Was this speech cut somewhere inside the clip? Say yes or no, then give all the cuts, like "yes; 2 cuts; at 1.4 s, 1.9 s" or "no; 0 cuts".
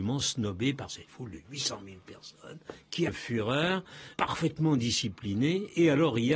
yes; 1 cut; at 3.1 s